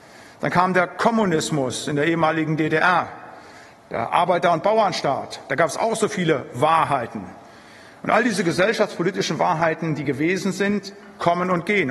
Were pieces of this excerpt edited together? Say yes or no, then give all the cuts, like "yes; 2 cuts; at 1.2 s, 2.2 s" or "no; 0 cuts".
no; 0 cuts